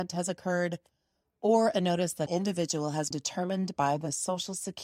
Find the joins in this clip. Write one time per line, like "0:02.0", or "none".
0:02.3
0:03.1